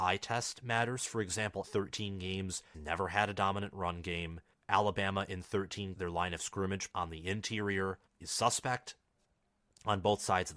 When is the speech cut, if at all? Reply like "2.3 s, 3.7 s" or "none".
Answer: 1.6 s, 2.7 s, 4.5 s, 5.9 s, 6.9 s, 8.1 s